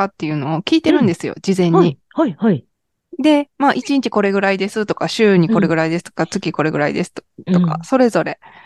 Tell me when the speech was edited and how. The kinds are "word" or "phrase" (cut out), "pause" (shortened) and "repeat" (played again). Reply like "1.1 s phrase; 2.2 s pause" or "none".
none